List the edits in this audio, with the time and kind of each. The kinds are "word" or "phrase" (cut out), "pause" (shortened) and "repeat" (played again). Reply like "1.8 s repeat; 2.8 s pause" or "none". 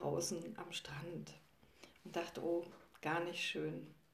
none